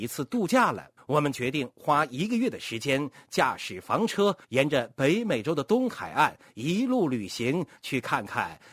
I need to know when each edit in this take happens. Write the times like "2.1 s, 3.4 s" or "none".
1.0 s, 4.4 s